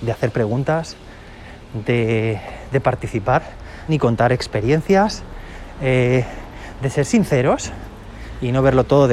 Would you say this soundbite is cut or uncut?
cut